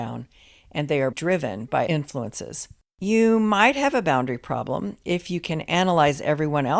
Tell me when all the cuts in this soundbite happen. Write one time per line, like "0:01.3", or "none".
0:01.1
0:01.9